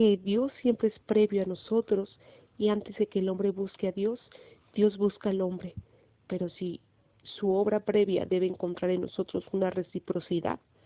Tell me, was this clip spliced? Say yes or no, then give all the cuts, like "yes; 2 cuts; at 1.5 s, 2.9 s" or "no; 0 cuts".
no; 0 cuts